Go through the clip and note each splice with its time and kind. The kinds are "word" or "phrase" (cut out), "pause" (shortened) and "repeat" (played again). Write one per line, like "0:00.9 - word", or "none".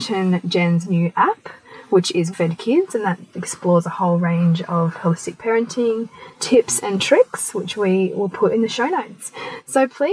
0:02.3 - word